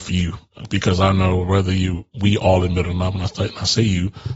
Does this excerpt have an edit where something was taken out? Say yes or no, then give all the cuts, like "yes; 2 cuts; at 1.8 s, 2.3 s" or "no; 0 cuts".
no; 0 cuts